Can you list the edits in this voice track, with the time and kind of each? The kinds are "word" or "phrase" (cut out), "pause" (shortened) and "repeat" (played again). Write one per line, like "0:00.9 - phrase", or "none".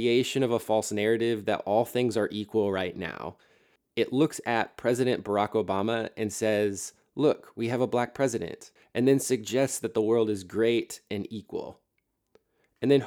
none